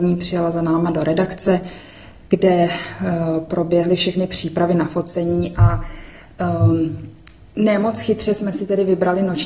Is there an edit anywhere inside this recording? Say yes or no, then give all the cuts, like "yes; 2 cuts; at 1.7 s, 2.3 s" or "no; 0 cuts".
no; 0 cuts